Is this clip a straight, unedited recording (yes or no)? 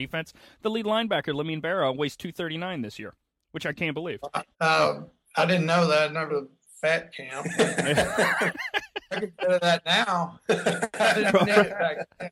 no